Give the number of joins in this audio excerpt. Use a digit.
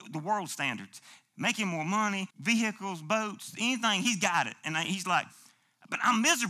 1